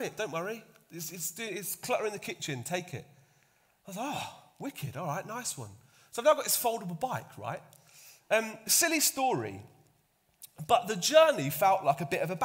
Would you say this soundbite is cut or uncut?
uncut